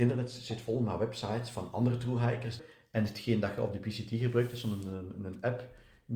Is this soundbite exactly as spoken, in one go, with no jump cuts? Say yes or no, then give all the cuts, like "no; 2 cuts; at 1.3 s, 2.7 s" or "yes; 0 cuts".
yes; 0 cuts